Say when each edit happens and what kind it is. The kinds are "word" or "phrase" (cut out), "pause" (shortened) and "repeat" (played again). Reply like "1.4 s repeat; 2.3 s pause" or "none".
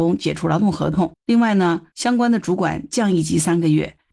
1.2 s pause